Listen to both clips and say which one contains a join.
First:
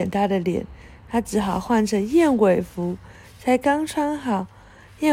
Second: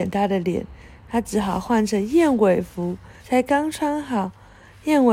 second; 1 cut; at 3.2 s

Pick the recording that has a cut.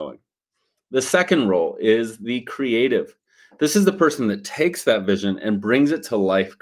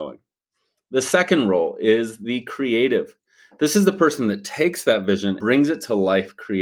second; 1 cut; at 5.4 s

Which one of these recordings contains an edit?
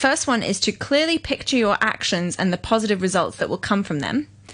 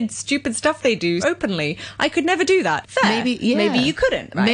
second; 2 cuts; at 1.2 s, 2.8 s

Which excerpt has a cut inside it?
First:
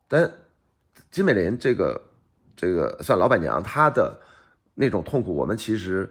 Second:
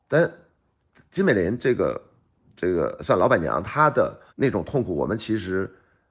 second; 1 cut; at 4.3 s

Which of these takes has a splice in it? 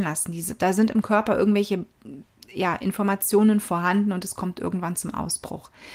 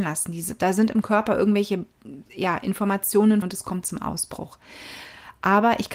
second; 3 cuts; at 2.3 s, 3.4 s, 3.8 s

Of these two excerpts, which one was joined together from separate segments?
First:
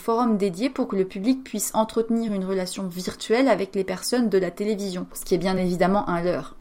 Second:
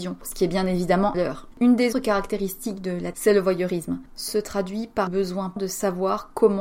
second; 6 cuts; at 1.1 s, 1.9 s, 3.1 s, 4.3 s, 5.1 s, 5.6 s

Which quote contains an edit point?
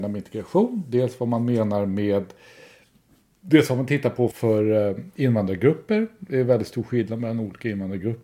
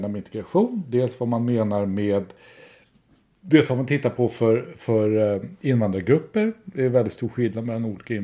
first; 1 cut; at 4.3 s

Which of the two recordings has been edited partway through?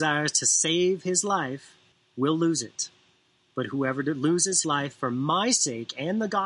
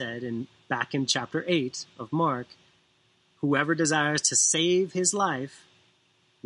first; 2 cuts; at 1.9 s, 4.6 s

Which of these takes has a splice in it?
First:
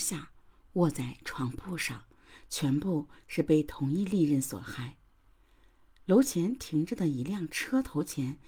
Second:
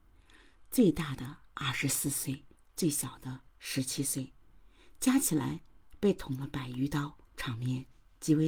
second; 3 cuts; at 2.5 s, 3.5 s, 7.2 s

